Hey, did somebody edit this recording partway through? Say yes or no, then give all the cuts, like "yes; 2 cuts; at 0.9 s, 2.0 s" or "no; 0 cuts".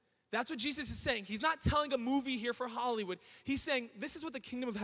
no; 0 cuts